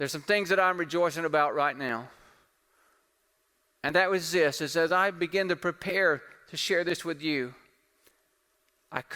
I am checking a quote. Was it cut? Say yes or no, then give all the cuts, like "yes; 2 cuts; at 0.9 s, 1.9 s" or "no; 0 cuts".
no; 0 cuts